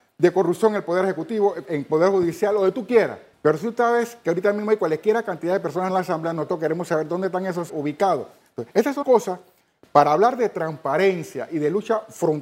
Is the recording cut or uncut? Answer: cut